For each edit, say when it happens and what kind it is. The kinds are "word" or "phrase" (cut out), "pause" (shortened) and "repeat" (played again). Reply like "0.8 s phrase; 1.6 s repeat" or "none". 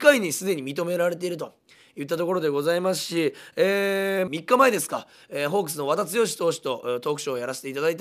4.3 s phrase